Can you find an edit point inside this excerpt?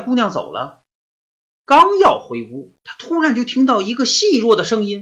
yes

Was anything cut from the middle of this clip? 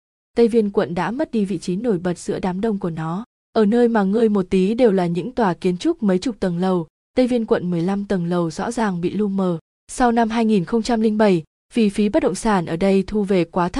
no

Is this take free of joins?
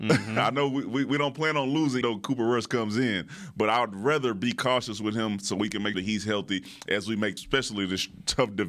no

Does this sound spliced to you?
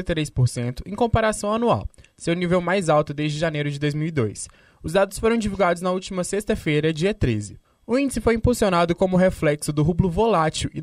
yes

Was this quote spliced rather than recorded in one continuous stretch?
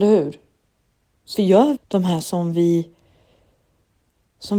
yes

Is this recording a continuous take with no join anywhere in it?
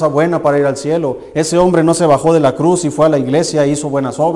yes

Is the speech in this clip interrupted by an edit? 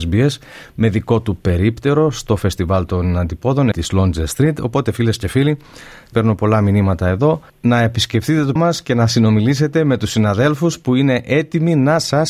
yes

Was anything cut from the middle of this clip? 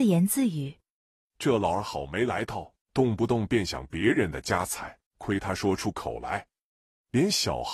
yes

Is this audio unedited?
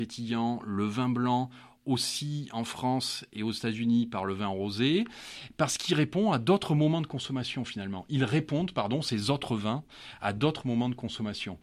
yes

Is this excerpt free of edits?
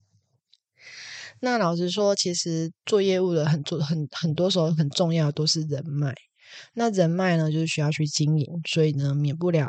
yes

